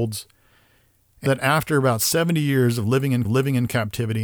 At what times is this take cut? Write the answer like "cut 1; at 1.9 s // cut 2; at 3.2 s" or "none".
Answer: cut 1; at 1.3 s // cut 2; at 3.2 s